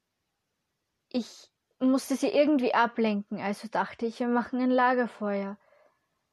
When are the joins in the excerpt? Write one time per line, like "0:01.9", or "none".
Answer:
none